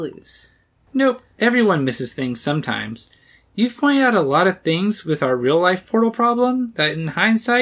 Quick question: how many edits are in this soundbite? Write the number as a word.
zero